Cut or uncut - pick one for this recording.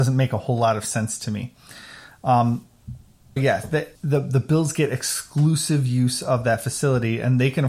cut